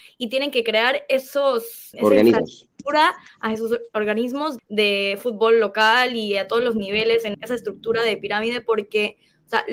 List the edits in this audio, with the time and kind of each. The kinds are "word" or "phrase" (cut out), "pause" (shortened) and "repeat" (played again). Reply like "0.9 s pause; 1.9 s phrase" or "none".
1.9 s word; 4.6 s word; 7.3 s word